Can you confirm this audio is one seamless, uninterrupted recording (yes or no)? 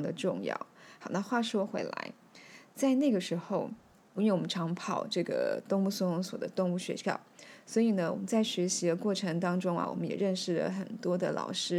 no